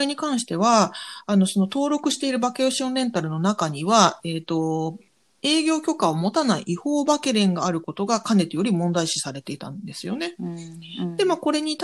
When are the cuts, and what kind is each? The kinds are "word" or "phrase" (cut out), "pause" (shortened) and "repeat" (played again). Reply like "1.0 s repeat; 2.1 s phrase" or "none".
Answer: none